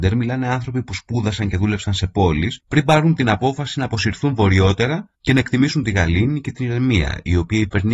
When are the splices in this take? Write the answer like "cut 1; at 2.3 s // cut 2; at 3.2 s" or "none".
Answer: cut 1; at 2.6 s // cut 2; at 5.1 s